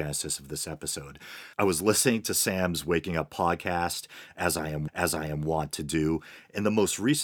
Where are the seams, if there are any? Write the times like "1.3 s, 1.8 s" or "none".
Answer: 1.5 s, 4.9 s

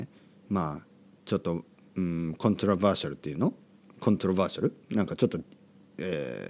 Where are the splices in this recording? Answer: none

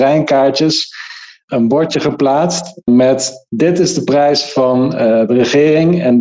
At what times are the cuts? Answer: none

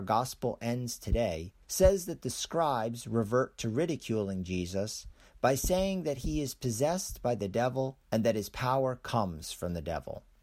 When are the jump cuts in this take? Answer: 1.6 s, 8.0 s

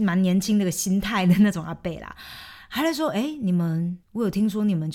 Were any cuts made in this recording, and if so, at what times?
4.0 s

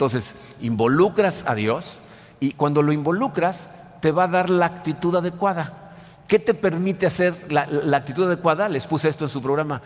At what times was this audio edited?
none

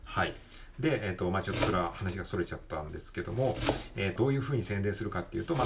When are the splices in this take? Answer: 4.2 s

